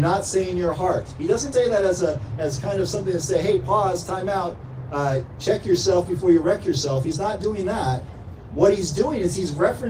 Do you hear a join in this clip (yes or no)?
yes